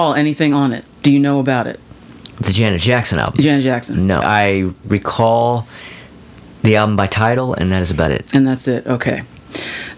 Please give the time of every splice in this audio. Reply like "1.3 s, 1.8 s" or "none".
4.2 s